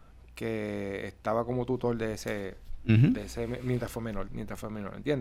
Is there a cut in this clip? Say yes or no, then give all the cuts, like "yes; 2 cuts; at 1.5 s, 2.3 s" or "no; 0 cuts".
yes; 1 cut; at 4.3 s